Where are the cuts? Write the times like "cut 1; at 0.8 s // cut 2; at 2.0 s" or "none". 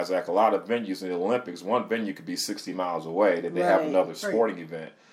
none

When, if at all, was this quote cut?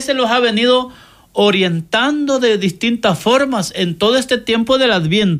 none

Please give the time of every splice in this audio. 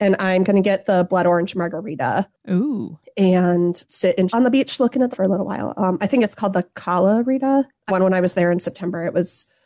cut 1; at 3.9 s // cut 2; at 4.3 s // cut 3; at 5.1 s // cut 4; at 7.9 s

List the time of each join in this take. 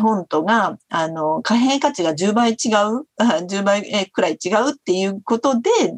cut 1; at 3.1 s

